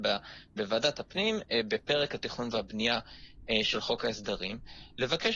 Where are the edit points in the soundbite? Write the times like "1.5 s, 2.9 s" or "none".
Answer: none